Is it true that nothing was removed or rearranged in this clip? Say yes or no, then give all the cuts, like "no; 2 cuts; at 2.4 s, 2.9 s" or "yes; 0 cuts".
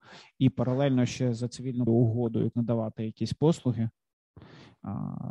no; 2 cuts; at 1.9 s, 2.5 s